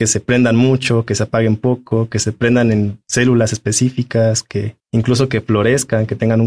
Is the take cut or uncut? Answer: cut